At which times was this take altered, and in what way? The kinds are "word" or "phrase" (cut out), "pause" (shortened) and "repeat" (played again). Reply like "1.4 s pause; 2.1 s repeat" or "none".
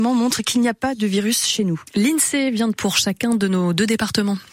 2.8 s phrase